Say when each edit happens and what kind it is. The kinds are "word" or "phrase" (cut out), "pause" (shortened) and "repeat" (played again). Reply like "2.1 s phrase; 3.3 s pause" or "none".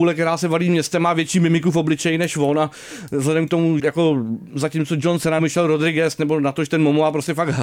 3.8 s word; 5.4 s word